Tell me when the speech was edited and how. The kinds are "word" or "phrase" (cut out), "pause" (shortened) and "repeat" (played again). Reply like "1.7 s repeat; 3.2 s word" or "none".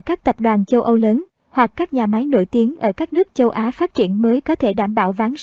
none